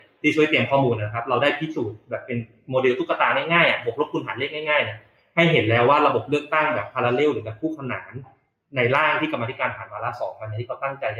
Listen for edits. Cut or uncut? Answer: uncut